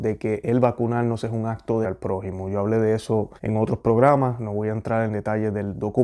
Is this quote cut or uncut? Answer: cut